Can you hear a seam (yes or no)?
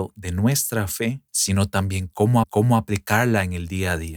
yes